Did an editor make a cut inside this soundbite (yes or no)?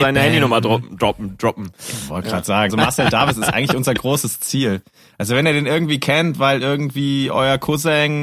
yes